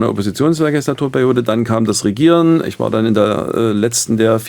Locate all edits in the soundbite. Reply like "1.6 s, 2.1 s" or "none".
none